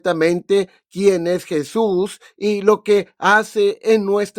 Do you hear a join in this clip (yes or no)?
no